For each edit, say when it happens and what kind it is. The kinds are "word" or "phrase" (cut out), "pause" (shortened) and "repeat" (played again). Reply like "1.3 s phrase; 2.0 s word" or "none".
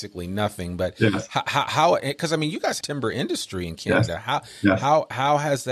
2.8 s phrase